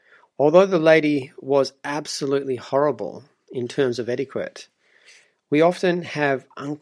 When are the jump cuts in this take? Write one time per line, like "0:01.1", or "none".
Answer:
none